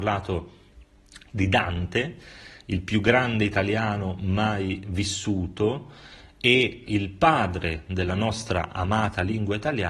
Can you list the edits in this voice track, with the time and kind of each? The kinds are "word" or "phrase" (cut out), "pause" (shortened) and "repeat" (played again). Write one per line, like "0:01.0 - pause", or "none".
0:06.8 - word